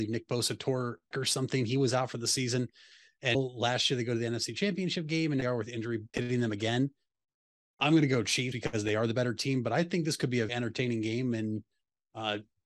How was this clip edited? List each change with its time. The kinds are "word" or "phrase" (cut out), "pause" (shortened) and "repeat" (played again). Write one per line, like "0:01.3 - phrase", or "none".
0:01.1 - phrase
0:03.3 - word
0:05.4 - phrase
0:06.1 - word
0:08.5 - word
0:10.5 - word